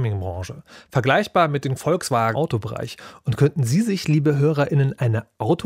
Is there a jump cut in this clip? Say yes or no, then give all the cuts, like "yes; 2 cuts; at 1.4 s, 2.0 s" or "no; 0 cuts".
yes; 2 cuts; at 1.8 s, 2.3 s